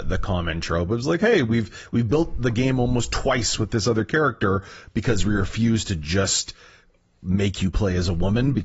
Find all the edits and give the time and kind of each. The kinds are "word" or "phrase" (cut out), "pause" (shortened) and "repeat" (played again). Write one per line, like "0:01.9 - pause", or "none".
none

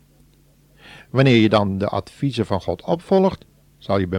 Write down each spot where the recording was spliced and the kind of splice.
none

